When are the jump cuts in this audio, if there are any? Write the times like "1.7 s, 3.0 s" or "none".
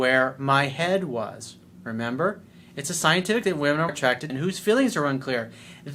3.4 s, 3.9 s, 4.3 s